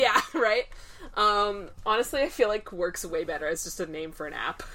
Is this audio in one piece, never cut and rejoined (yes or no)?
no